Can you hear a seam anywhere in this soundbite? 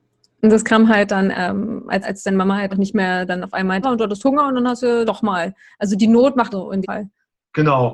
yes; 7 cuts; at 1.3 s, 2.0 s, 2.7 s, 3.8 s, 5.1 s, 6.5 s, 6.8 s

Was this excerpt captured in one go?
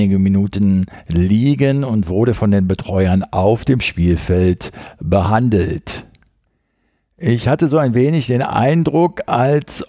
yes; 0 cuts

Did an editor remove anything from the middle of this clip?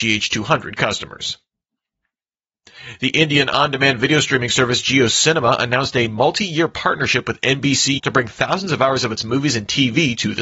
yes; 1 cut; at 8.0 s

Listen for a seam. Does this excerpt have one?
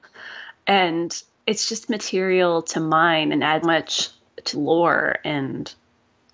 yes; 5 cuts; at 1.4 s, 1.9 s, 3.3 s, 3.6 s, 4.5 s

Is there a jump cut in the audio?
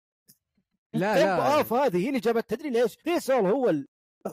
yes; 2 cuts; at 0.9 s, 3.0 s

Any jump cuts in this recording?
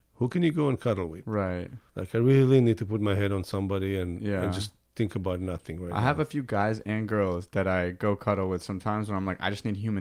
yes; 1 cut; at 1.9 s

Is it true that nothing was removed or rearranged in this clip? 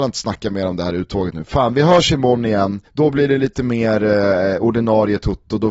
no; 1 cut; at 2.9 s

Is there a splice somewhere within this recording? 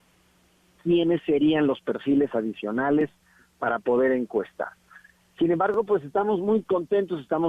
no; 0 cuts

